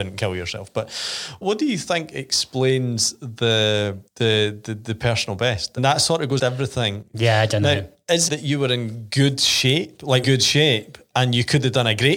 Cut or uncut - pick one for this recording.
cut